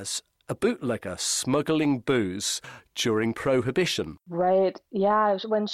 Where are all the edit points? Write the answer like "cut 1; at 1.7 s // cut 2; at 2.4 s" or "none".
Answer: cut 1; at 4.2 s